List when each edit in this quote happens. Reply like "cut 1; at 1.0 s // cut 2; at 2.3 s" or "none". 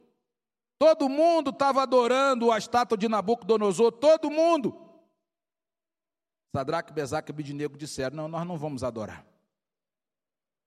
none

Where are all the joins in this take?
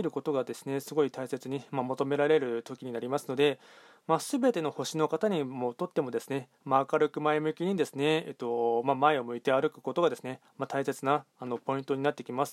none

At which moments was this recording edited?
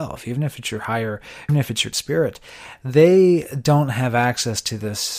cut 1; at 1.5 s // cut 2; at 1.9 s

